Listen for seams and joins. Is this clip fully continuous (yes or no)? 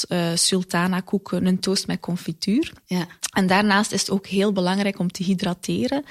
yes